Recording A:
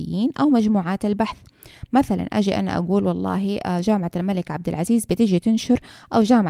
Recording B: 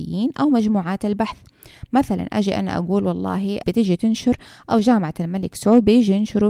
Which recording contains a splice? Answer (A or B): B